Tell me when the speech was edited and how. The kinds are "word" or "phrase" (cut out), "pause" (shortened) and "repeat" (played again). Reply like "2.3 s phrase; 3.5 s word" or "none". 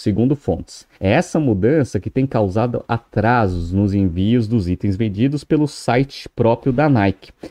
0.9 s pause